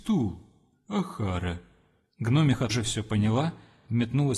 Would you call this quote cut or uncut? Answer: cut